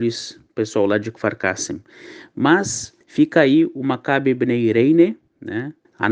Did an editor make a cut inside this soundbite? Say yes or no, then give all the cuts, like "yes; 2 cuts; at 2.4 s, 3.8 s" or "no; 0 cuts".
no; 0 cuts